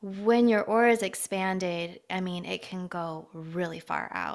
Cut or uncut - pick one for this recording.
uncut